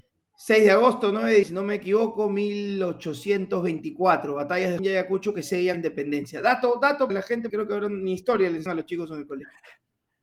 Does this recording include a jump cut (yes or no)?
yes